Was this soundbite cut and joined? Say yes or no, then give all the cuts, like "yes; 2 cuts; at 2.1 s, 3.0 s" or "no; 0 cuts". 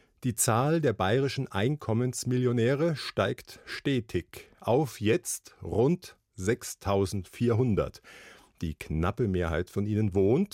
no; 0 cuts